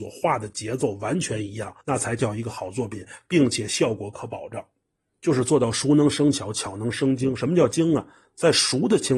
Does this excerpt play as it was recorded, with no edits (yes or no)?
no